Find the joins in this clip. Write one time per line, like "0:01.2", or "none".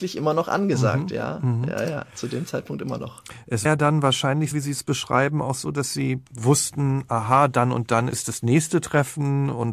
0:03.7
0:04.5